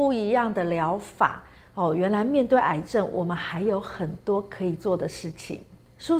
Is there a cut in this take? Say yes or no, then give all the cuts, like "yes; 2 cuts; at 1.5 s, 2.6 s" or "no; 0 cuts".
no; 0 cuts